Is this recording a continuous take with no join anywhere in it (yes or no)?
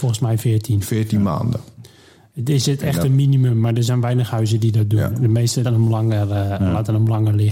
no